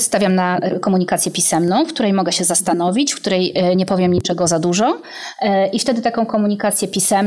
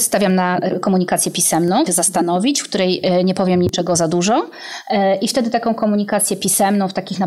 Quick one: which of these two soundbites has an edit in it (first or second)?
second